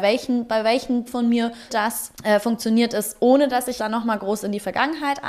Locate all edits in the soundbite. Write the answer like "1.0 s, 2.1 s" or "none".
1.1 s, 1.7 s, 2.1 s, 3.8 s